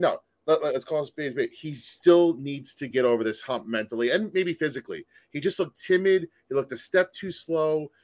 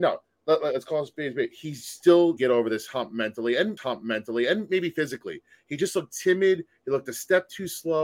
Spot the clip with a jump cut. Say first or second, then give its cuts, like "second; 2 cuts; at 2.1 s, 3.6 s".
second; 2 cuts; at 2.4 s, 3.8 s